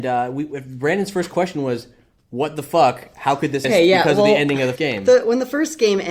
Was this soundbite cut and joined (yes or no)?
yes